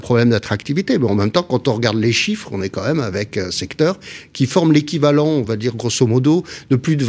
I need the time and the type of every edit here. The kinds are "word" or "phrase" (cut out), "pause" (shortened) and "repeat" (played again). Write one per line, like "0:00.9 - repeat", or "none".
none